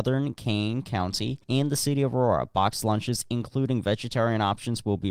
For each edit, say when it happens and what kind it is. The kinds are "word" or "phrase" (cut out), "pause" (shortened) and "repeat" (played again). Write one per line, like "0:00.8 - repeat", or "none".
0:01.4 - pause